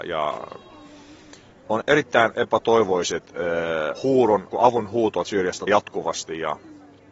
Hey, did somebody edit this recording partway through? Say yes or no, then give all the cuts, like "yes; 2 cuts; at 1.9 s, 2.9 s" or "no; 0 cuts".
yes; 5 cuts; at 1.8 s, 4.0 s, 4.5 s, 5.2 s, 5.7 s